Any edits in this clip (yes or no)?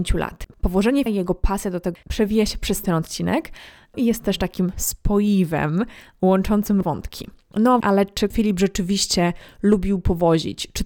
yes